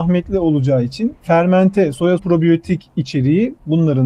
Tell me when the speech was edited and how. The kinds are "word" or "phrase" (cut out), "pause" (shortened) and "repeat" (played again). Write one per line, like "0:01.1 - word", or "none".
0:01.2 - pause
0:02.2 - phrase